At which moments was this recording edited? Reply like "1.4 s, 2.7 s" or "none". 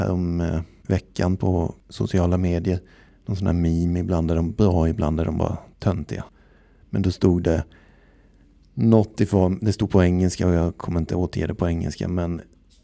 none